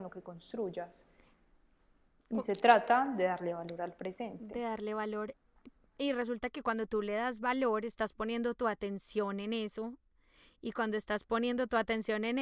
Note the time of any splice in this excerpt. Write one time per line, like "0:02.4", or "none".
none